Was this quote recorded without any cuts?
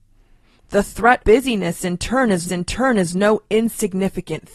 no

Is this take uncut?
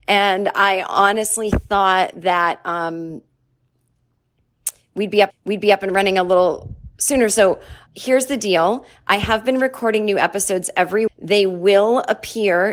no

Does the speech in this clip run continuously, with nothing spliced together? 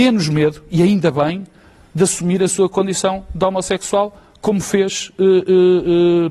yes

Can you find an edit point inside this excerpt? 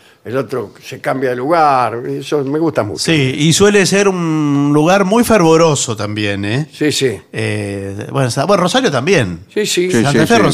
no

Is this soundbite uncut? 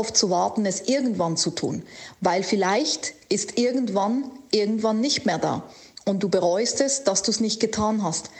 yes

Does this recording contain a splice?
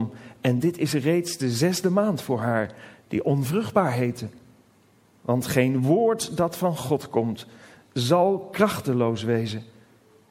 no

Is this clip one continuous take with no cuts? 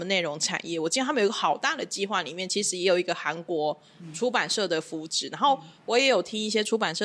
yes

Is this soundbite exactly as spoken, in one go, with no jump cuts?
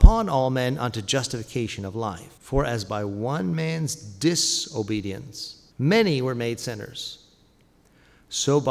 no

